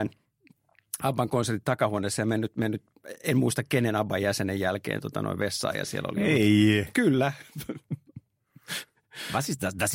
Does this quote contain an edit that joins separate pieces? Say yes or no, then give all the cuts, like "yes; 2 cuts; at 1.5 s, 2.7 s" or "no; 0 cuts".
no; 0 cuts